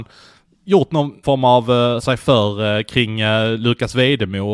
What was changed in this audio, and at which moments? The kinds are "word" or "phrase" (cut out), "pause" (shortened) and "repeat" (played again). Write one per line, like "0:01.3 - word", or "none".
0:01.2 - word
0:02.0 - word